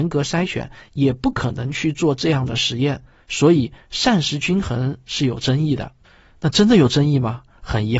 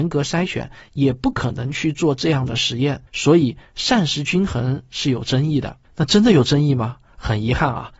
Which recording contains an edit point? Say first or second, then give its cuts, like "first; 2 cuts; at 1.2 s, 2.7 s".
second; 2 cuts; at 3.1 s, 5.8 s